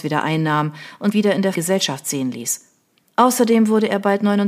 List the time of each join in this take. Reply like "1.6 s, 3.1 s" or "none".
1.1 s, 1.5 s